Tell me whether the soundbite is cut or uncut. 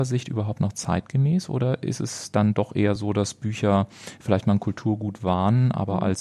uncut